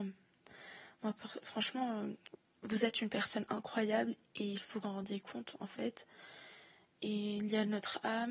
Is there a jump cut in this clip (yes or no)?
yes